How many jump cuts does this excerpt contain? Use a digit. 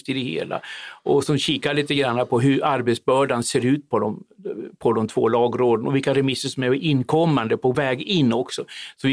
0